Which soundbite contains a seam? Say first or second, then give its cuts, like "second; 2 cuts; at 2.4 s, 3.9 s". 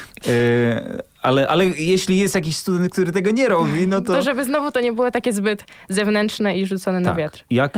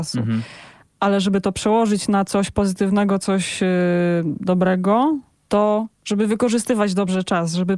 second; 1 cut; at 5.9 s